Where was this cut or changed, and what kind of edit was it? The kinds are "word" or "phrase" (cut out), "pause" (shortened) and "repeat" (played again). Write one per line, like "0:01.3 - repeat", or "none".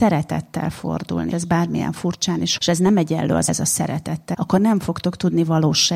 0:01.3 - word
0:02.6 - word
0:03.5 - word
0:04.3 - word